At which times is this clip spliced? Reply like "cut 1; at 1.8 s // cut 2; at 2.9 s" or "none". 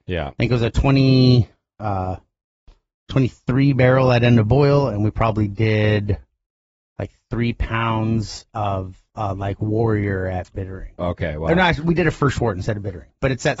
none